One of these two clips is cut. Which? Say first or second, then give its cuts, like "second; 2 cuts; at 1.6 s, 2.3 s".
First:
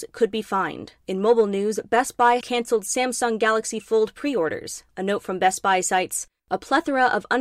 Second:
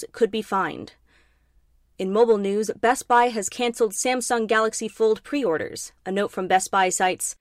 first; 2 cuts; at 1.0 s, 2.4 s